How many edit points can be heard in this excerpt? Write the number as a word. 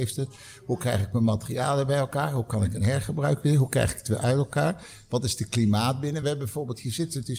zero